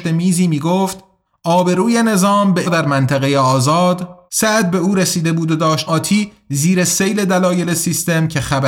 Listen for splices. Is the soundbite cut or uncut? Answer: cut